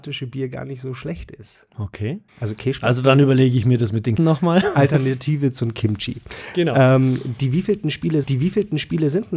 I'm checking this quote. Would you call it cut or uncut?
cut